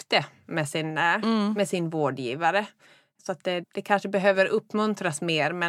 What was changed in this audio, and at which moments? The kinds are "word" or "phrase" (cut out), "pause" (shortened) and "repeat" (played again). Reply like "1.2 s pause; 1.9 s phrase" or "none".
none